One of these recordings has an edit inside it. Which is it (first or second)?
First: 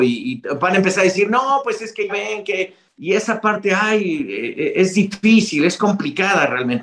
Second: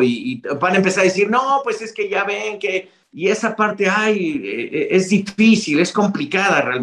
first